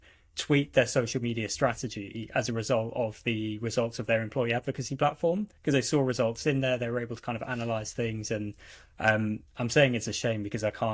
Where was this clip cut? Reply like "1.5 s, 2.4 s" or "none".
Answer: 5.6 s, 9.5 s